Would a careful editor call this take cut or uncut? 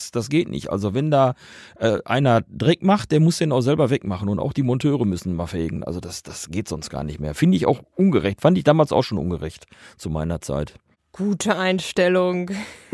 uncut